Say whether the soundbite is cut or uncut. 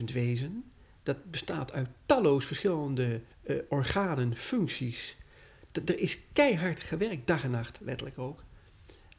cut